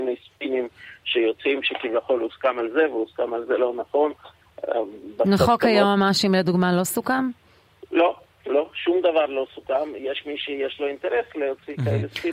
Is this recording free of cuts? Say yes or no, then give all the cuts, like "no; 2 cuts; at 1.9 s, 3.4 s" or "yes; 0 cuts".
no; 2 cuts; at 3.5 s, 5.4 s